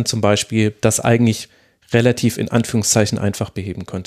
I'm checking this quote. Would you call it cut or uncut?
uncut